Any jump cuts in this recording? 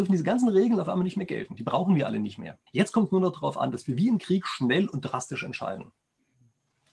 yes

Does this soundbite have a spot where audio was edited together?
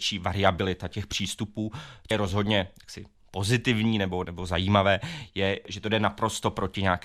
yes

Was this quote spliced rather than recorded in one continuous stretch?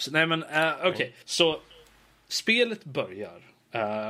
yes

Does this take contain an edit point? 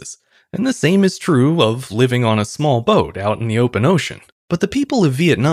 yes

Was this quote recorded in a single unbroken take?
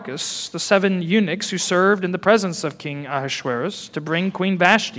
yes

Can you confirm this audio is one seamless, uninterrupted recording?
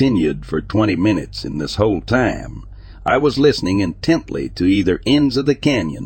yes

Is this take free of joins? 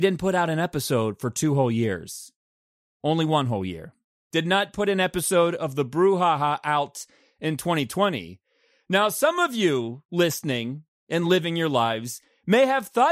yes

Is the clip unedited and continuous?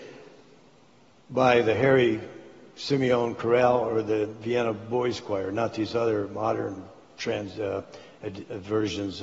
yes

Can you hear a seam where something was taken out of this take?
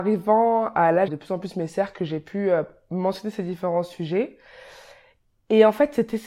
yes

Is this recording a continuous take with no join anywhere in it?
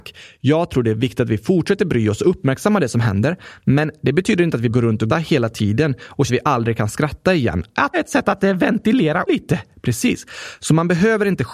no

